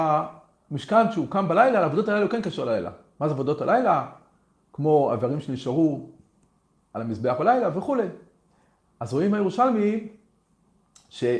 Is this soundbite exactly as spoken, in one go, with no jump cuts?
yes; 0 cuts

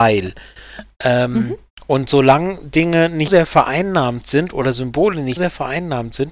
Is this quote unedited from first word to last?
no; 2 cuts; at 3.3 s, 5.4 s

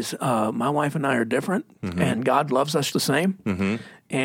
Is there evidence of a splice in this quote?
yes; 1 cut; at 2.9 s

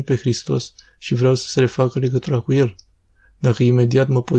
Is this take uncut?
yes; 0 cuts

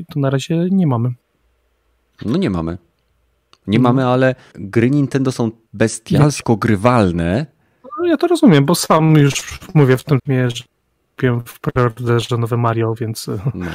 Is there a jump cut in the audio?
yes; 3 cuts; at 4.5 s, 5.7 s, 10.2 s

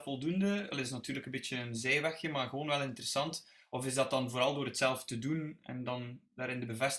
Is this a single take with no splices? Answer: yes; 0 cuts

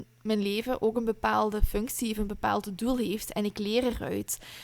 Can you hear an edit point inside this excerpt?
no; 0 cuts

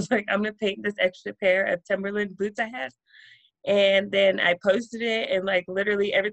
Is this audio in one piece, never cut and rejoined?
yes; 0 cuts

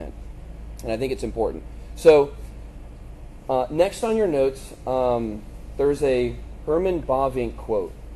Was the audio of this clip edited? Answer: no; 0 cuts

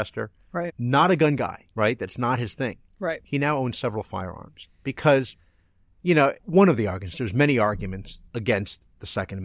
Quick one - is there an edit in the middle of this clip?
yes; 4 cuts; at 1.7 s, 4.7 s, 6.4 s, 8.3 s

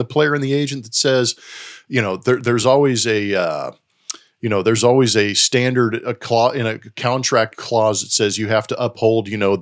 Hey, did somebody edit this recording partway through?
no; 0 cuts

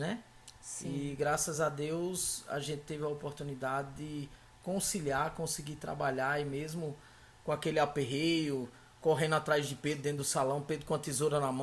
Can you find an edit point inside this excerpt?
no; 0 cuts

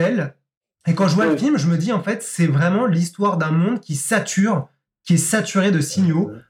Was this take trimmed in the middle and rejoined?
no; 0 cuts

